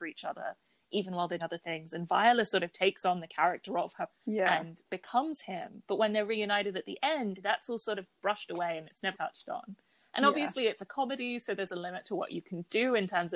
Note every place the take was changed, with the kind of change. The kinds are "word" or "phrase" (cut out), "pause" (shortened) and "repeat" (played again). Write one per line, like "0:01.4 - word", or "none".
0:01.4 - word
0:04.1 - word
0:04.8 - word
0:09.1 - word